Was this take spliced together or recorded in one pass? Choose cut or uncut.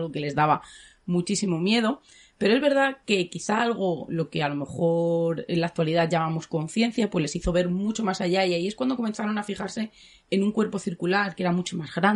uncut